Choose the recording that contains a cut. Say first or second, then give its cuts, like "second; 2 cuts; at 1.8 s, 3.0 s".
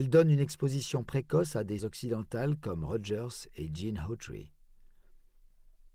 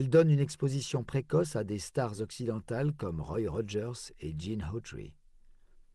first; 2 cuts; at 1.8 s, 2.9 s